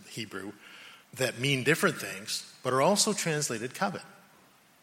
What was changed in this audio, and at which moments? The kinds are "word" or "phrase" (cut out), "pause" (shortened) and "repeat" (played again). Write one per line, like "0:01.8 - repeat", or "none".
0:01.0 - pause